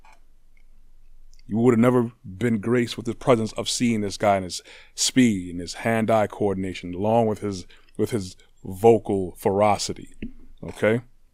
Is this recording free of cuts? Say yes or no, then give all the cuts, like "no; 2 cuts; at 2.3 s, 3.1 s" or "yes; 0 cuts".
yes; 0 cuts